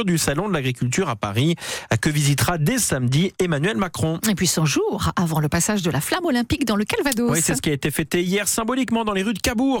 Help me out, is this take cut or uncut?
uncut